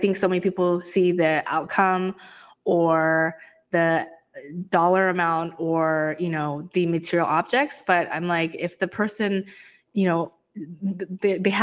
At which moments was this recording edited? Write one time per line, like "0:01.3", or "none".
none